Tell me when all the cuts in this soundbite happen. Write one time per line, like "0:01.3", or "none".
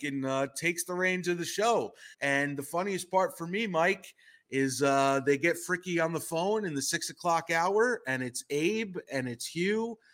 0:02.1

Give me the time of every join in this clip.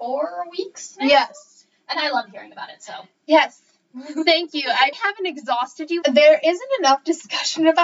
0:04.9
0:06.0

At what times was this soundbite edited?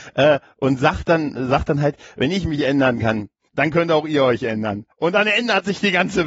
0:03.5
0:04.9

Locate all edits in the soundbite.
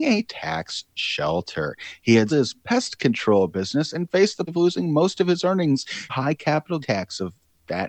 0:02.3
0:04.5
0:06.1
0:06.8

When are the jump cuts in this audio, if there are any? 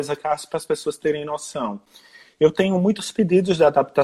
none

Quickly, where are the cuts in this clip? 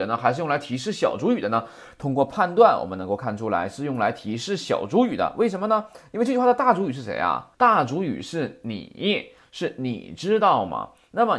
0:07.5

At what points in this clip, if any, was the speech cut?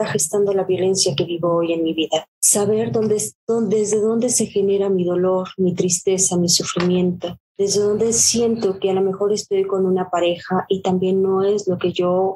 0:02.3
0:07.5

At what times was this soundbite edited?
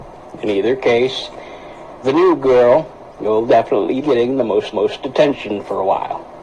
0:02.0
0:03.1
0:04.0
0:04.7

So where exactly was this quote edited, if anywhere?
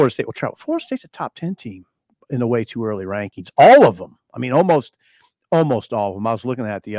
none

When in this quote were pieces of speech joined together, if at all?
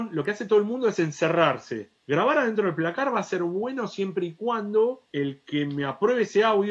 0:02.0
0:05.0

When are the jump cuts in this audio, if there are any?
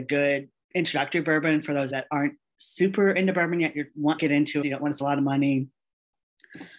0:01.9
0:04.2
0:04.6
0:05.0

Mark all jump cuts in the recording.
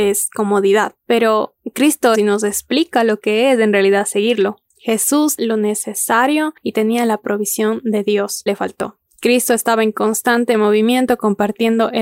0:02.1
0:05.4
0:08.5

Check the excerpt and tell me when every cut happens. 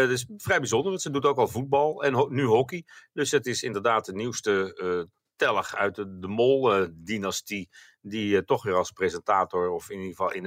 none

